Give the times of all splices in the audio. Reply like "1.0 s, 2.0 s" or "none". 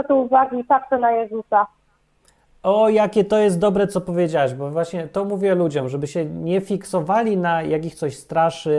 none